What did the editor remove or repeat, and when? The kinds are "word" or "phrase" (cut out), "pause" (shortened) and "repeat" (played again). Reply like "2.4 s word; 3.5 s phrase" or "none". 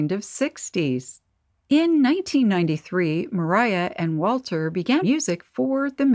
5.0 s word